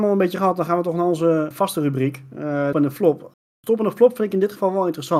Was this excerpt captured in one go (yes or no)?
no